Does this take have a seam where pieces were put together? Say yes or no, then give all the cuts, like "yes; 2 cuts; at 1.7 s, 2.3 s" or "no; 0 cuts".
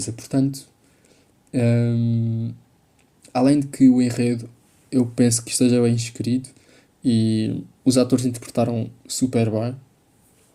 no; 0 cuts